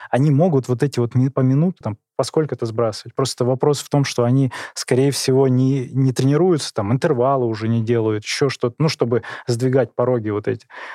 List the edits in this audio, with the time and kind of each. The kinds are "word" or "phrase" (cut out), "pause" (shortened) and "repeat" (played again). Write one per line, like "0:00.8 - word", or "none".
0:01.8 - word